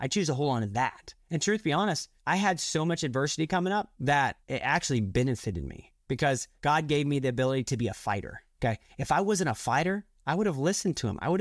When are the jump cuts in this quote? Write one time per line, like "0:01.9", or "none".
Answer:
none